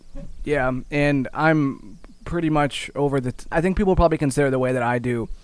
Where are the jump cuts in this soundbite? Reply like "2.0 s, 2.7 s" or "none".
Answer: 3.5 s